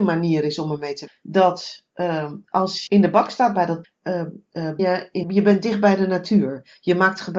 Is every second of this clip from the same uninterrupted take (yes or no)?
no